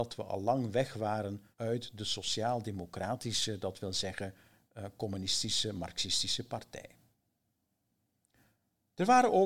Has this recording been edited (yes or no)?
yes